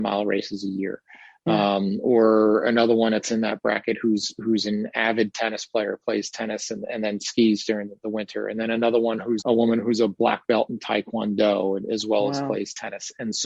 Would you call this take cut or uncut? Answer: cut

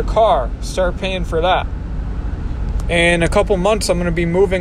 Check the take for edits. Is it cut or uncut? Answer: uncut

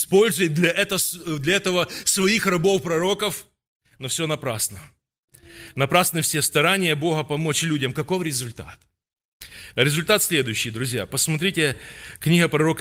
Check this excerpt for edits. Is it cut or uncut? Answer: uncut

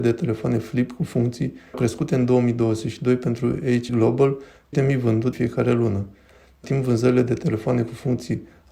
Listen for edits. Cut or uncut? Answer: cut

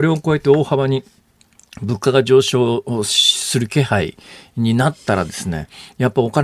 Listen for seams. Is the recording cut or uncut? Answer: uncut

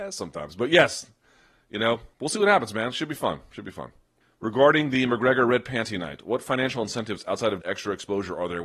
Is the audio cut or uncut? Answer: cut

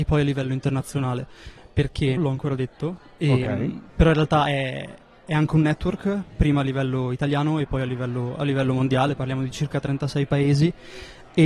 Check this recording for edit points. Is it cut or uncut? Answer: cut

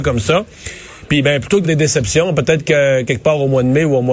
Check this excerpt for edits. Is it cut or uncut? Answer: cut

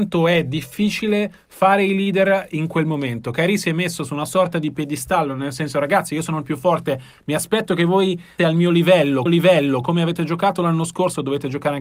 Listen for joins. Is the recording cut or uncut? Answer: cut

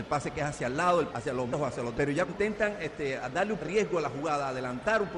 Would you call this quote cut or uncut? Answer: cut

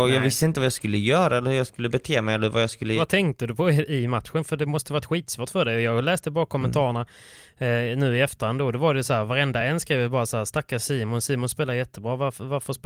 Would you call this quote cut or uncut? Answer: uncut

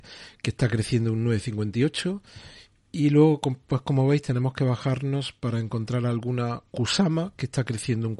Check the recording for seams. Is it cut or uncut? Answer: uncut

